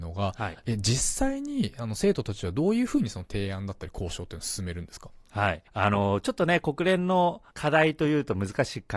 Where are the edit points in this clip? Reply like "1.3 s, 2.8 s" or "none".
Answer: 5.7 s, 7.5 s